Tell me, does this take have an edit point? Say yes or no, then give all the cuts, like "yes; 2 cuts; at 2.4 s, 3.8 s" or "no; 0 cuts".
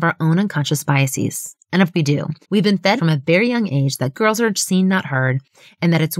yes; 4 cuts; at 1.9 s, 2.4 s, 3.0 s, 4.1 s